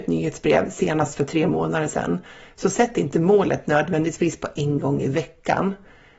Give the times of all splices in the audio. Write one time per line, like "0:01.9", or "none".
none